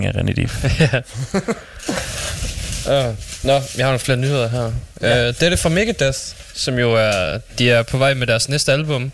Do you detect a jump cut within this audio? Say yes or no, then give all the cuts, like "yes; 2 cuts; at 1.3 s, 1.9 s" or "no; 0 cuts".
no; 0 cuts